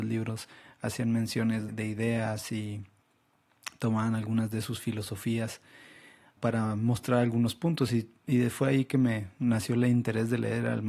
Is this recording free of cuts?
no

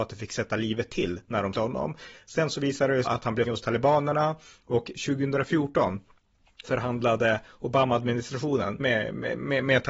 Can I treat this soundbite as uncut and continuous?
no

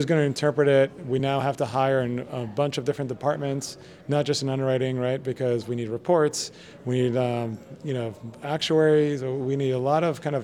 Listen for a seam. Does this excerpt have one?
no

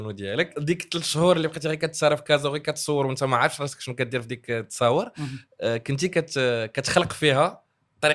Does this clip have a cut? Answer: no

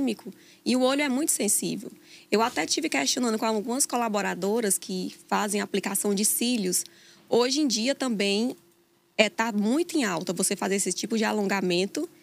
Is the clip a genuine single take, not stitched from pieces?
yes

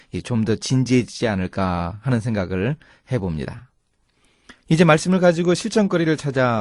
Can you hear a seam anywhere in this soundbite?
yes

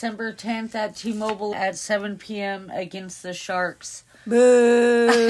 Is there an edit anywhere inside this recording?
yes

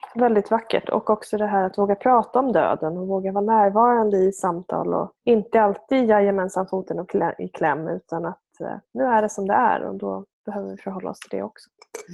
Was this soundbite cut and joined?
yes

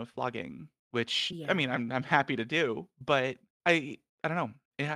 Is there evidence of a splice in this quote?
no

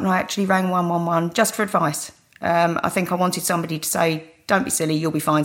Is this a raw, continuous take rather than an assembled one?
yes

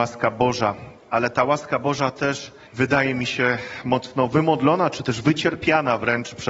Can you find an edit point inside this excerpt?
no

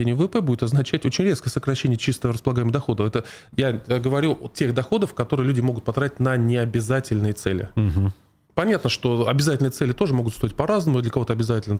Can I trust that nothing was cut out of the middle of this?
yes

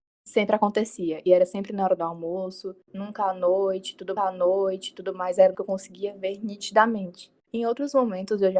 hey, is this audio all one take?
no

